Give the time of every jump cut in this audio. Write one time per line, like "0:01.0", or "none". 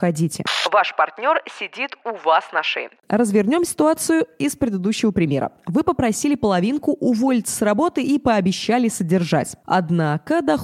none